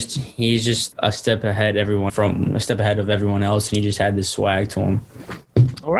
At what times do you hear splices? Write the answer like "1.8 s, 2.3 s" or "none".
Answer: 0.9 s, 2.1 s